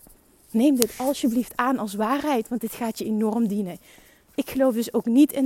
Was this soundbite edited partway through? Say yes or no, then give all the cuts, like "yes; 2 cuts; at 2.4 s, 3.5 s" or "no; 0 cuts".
no; 0 cuts